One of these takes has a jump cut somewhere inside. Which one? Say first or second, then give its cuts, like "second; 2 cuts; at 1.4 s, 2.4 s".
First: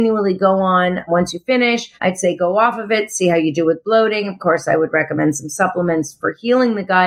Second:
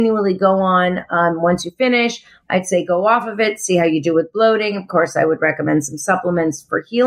first; 2 cuts; at 1.1 s, 2.0 s